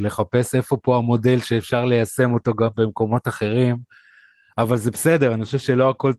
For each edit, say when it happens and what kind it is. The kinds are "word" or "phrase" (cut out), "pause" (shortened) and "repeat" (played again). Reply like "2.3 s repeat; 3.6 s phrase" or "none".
none